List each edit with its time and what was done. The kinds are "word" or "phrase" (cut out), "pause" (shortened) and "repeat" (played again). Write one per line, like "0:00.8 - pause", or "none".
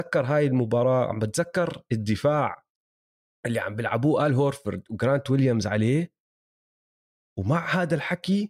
none